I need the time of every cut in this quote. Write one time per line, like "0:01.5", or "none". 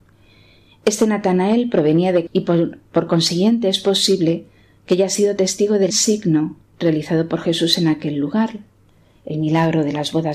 0:02.3
0:05.9